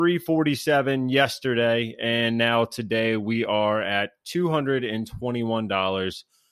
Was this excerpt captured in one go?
yes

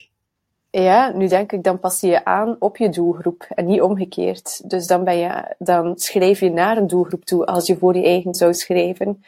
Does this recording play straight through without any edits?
no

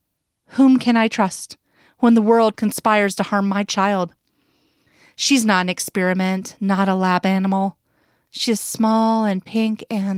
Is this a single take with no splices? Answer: yes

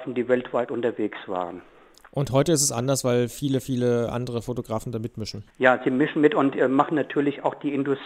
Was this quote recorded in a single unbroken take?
no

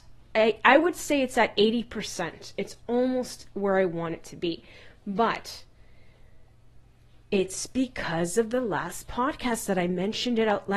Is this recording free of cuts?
yes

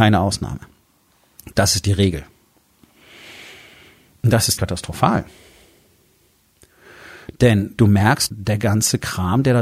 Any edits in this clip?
yes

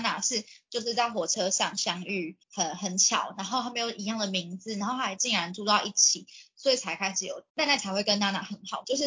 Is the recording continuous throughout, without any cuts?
no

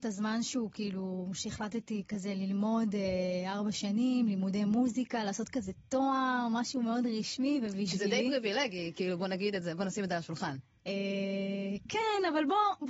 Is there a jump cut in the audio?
no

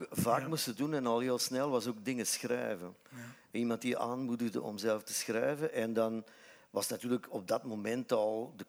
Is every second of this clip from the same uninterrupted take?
yes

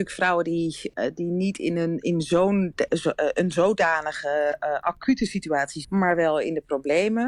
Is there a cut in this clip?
yes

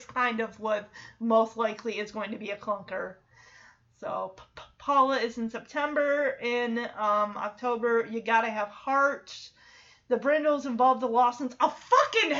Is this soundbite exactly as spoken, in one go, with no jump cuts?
yes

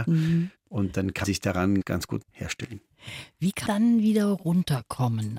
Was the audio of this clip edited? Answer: yes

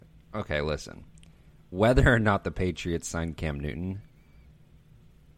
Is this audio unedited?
yes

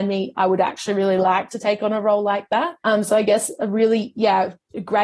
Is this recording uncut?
no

